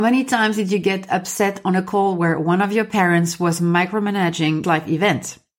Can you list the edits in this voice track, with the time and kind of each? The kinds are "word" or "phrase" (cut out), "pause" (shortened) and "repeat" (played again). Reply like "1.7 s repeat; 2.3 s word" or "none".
4.6 s phrase